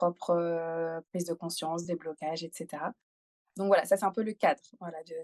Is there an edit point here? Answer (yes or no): no